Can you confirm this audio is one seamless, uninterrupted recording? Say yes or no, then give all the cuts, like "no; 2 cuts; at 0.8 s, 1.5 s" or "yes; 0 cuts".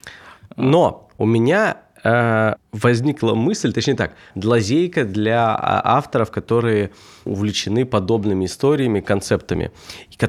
no; 3 cuts; at 2.6 s, 4.3 s, 7.3 s